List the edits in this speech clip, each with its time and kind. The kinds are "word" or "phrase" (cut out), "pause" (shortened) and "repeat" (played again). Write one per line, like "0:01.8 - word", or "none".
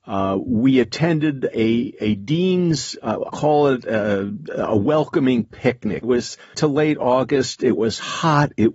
0:03.3 - word
0:06.0 - word
0:06.5 - word